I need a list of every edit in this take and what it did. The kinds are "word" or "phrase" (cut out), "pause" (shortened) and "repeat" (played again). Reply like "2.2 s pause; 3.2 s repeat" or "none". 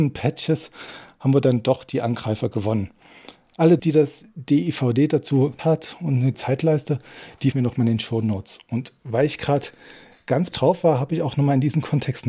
3.8 s word; 5.6 s word; 7.5 s word; 10.5 s word